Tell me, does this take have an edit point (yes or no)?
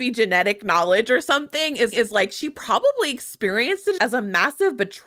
yes